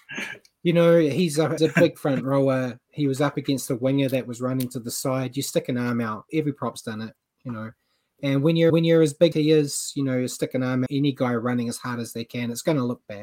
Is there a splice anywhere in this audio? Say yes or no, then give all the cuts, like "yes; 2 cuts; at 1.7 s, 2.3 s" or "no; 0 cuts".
yes; 4 cuts; at 1.6 s, 8.7 s, 9.3 s, 10.9 s